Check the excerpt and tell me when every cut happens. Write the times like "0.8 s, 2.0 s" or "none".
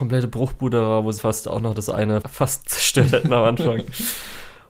1.2 s, 2.2 s